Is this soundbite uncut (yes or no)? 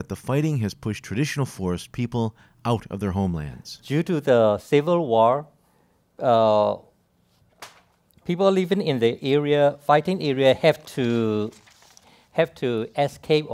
yes